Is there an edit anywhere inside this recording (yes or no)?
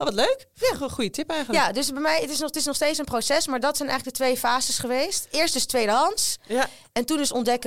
no